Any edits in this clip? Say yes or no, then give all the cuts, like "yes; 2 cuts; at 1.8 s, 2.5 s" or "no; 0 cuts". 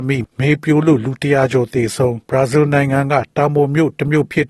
yes; 1 cut; at 2.2 s